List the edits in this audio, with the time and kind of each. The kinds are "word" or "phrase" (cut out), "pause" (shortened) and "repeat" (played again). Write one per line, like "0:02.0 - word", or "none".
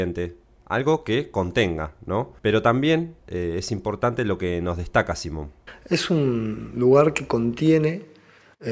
0:02.4 - pause
0:03.2 - pause